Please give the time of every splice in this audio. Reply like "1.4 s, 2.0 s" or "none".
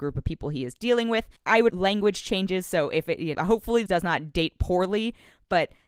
1.4 s, 1.7 s, 3.3 s, 3.9 s